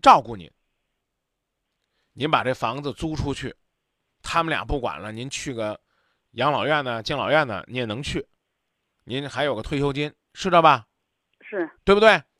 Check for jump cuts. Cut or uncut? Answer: uncut